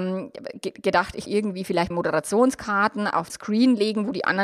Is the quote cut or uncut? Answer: cut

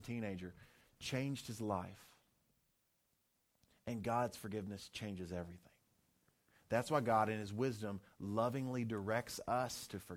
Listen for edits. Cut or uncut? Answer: uncut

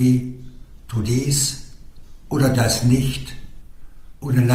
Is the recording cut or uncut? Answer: cut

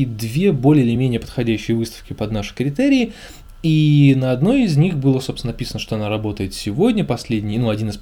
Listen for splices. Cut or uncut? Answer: uncut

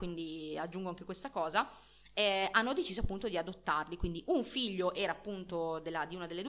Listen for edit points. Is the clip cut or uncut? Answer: uncut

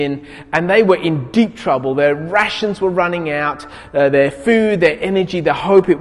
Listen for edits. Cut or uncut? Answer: uncut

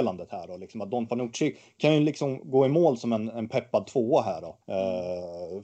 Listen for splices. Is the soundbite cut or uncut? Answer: cut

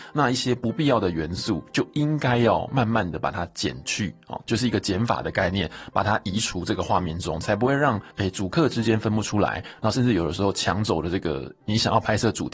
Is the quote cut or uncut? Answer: cut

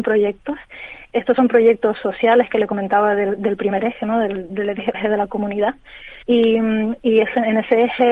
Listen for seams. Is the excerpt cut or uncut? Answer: cut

